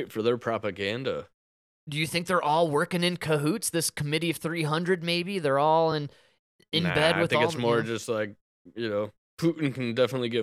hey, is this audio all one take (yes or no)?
yes